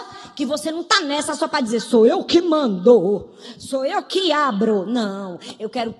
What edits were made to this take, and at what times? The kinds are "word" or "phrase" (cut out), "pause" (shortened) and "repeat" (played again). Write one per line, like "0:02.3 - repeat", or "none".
none